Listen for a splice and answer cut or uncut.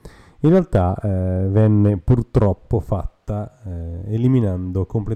uncut